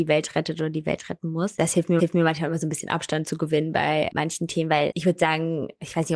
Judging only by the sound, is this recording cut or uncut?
cut